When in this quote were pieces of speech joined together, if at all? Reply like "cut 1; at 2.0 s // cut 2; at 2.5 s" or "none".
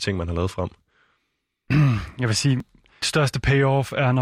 cut 1; at 3.0 s